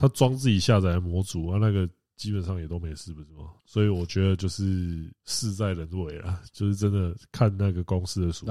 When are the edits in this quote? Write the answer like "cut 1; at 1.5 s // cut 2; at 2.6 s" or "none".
cut 1; at 3.6 s // cut 2; at 5.2 s